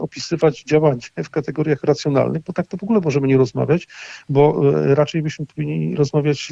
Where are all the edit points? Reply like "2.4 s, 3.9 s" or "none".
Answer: none